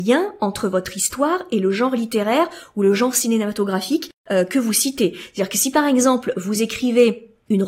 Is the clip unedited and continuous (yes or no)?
yes